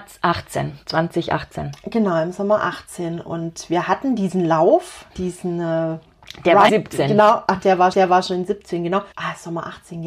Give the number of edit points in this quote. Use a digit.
4